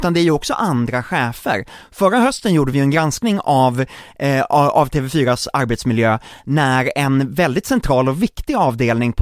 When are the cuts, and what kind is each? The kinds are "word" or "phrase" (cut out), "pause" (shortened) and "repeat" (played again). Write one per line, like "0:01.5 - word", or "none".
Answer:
none